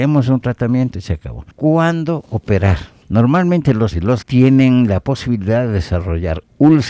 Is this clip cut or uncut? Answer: cut